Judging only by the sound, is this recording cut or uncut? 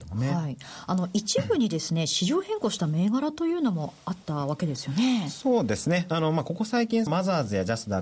cut